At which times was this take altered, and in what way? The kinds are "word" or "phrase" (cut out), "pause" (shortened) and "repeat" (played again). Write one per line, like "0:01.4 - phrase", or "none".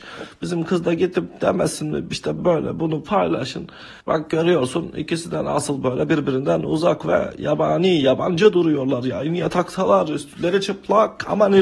0:02.4 - word
0:04.0 - pause